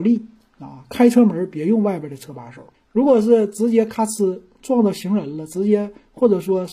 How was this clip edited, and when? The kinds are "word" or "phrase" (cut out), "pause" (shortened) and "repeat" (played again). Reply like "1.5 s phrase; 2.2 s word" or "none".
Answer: 2.7 s pause

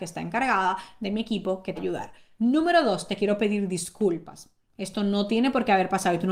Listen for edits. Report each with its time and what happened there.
1.8 s phrase

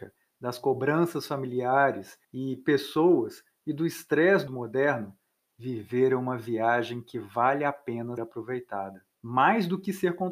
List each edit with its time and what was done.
2.2 s pause; 4.5 s word; 8.2 s word; 9.1 s pause

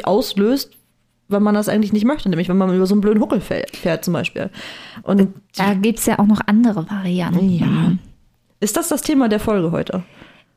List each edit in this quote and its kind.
5.5 s pause

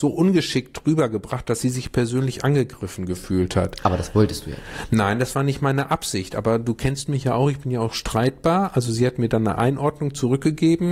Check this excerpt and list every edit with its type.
none

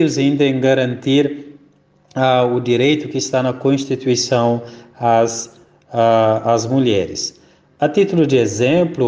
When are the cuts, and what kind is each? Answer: none

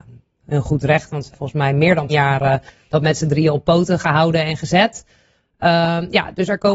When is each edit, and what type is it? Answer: 1.3 s word; 2.1 s word

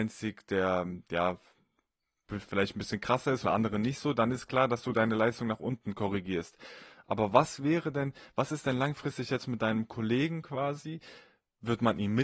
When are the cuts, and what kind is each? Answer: 3.4 s word

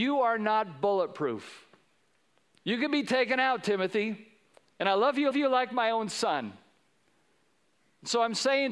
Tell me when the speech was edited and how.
1.8 s pause; 4.5 s pause; 5.3 s repeat

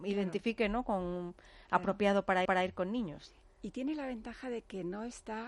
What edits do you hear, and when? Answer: 2.5 s repeat

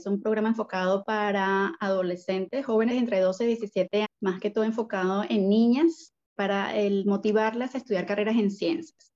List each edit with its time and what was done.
2.9 s word; 4.0 s word; 6.4 s word

